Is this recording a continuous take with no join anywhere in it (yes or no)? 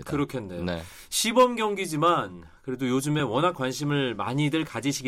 yes